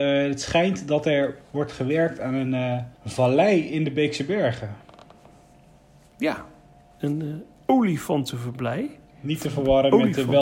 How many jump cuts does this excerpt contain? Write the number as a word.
one